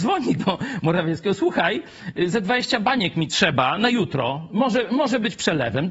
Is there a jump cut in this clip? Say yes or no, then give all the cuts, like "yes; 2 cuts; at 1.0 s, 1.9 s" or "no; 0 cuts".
no; 0 cuts